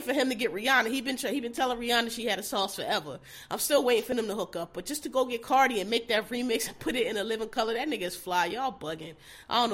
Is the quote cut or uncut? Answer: uncut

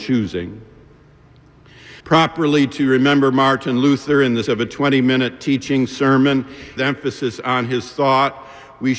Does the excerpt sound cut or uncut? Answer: cut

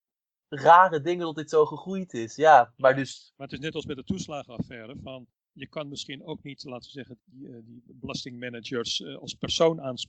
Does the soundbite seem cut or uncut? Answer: cut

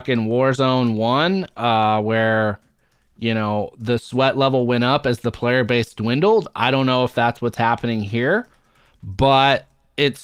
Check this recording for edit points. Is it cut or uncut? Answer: uncut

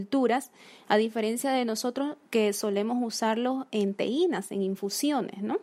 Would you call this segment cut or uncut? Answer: cut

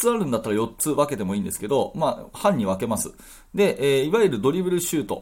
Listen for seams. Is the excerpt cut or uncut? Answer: uncut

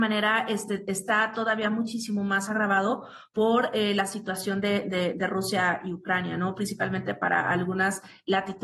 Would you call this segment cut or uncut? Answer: uncut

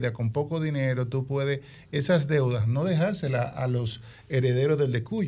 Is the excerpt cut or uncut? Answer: uncut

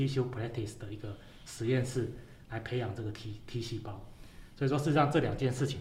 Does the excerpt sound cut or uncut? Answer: uncut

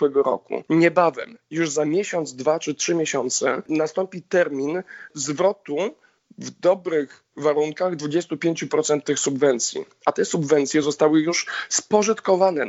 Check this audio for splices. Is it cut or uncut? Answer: uncut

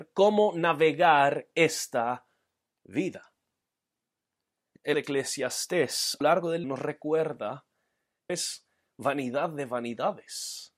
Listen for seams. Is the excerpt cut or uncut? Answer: cut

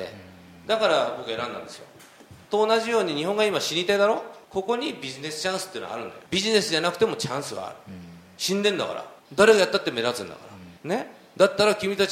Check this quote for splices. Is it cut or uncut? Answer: cut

